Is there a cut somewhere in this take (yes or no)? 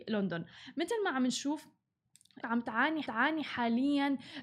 yes